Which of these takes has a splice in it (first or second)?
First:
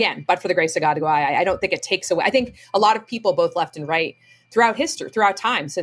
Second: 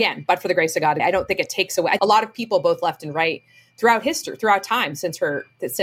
second